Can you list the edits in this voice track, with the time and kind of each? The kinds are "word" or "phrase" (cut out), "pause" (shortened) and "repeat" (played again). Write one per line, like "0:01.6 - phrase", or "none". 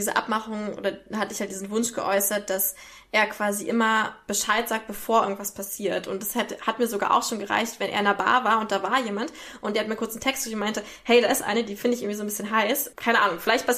none